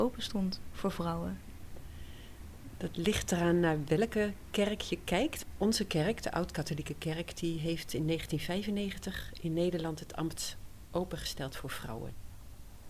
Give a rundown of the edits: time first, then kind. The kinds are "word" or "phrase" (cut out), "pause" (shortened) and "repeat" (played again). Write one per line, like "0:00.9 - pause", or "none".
none